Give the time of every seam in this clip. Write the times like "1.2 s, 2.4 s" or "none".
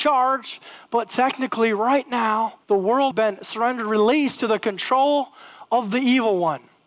2.6 s, 3.1 s, 4.4 s